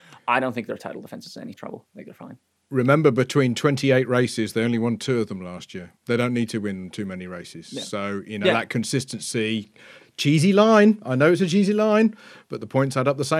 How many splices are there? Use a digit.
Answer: 2